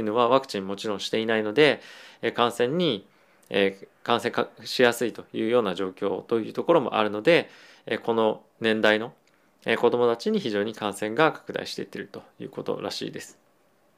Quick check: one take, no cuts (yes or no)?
yes